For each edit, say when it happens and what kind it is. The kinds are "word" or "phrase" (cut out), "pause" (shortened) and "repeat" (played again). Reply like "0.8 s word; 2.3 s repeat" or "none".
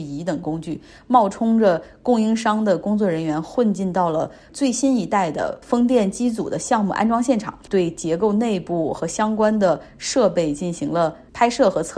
7.6 s pause